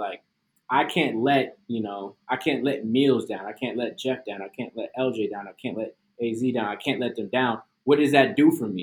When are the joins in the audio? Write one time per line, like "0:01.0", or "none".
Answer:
none